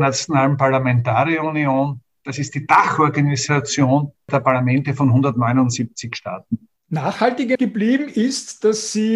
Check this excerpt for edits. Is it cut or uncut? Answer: cut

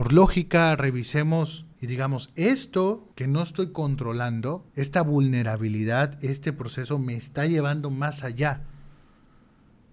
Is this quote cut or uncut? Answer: cut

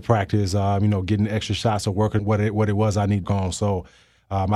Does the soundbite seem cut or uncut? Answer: cut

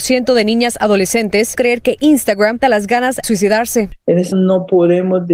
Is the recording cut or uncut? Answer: cut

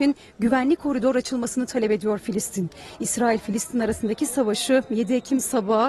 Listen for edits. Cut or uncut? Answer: uncut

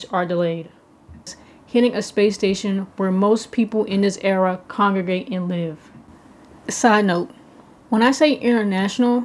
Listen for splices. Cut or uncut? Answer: uncut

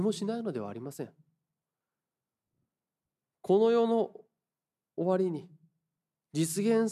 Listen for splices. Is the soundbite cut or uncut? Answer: uncut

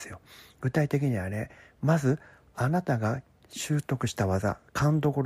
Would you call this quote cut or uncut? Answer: uncut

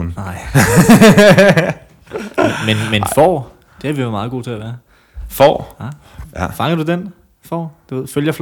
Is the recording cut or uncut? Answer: uncut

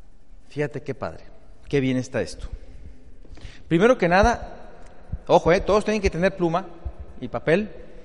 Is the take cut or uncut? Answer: uncut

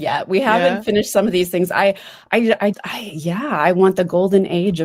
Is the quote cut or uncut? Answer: cut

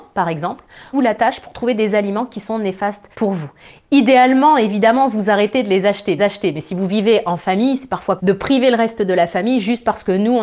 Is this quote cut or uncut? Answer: cut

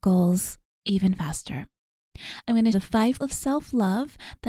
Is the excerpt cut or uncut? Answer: cut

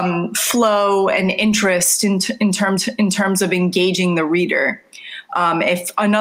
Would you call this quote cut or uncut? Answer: cut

